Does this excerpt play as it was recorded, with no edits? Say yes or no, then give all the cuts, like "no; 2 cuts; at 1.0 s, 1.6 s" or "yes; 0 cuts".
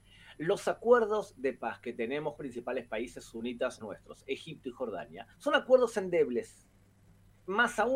no; 3 cuts; at 2.4 s, 3.8 s, 5.3 s